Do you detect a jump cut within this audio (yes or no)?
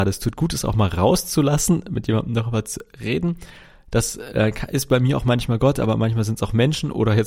no